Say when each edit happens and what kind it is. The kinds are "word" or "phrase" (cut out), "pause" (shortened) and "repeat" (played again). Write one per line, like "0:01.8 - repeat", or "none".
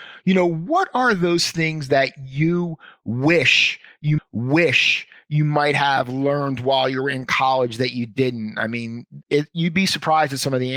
0:04.2 - repeat
0:09.2 - word